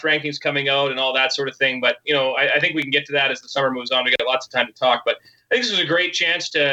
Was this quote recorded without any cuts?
yes; 0 cuts

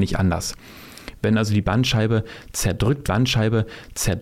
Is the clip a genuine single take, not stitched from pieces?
no; 1 cut; at 3.0 s

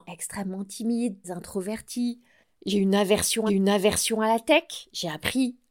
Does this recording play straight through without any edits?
no; 2 cuts; at 1.2 s, 3.5 s

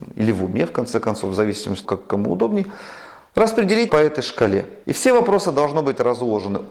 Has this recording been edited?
yes; 3 cuts; at 1.8 s, 3.9 s, 4.8 s

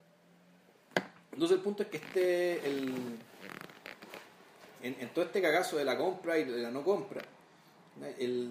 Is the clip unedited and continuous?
no; 2 cuts; at 1.9 s, 4.8 s

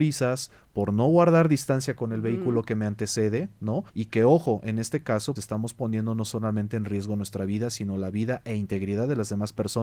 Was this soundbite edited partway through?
yes; 2 cuts; at 3.9 s, 5.4 s

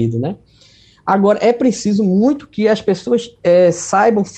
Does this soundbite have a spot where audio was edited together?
no; 0 cuts

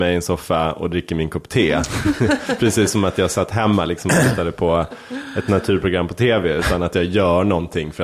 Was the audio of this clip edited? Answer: no; 0 cuts

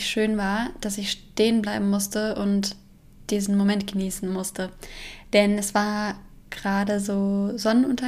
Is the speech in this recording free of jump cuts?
yes; 0 cuts

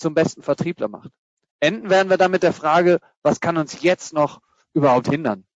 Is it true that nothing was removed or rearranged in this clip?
yes; 0 cuts

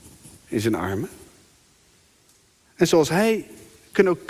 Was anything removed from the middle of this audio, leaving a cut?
no; 0 cuts

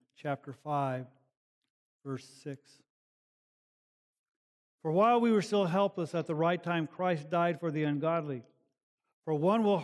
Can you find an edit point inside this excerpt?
no; 0 cuts

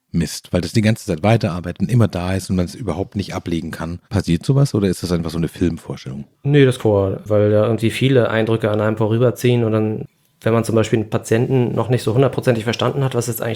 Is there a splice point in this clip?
yes; 3 cuts; at 4.0 s, 6.3 s, 6.8 s

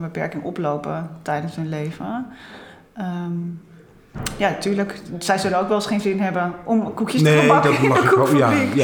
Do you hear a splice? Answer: no; 0 cuts

